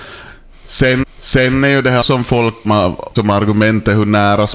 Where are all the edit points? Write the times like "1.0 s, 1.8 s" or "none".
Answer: 1.0 s, 2.0 s, 2.6 s, 3.2 s